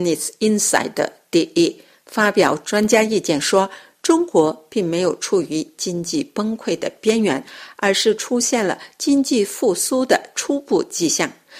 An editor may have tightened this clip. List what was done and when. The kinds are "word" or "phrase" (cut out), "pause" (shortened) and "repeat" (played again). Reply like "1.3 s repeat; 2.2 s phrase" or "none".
none